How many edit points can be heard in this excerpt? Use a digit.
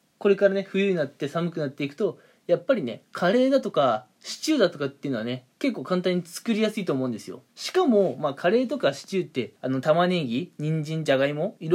3